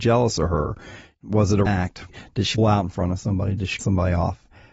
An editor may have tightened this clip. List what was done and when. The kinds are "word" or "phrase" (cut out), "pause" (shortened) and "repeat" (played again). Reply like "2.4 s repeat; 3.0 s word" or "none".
1.7 s word; 2.6 s word; 3.8 s word